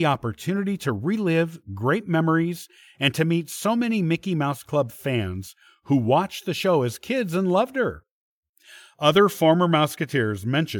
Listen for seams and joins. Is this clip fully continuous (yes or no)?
yes